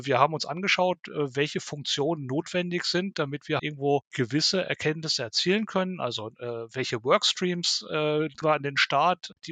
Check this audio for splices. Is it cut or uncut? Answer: cut